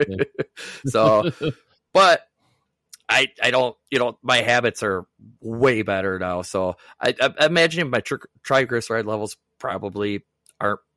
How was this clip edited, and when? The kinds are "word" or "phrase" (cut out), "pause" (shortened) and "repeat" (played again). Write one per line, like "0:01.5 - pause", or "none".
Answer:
none